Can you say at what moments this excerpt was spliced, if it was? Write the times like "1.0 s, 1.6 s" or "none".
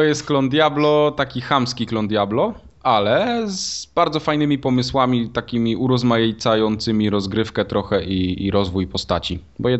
none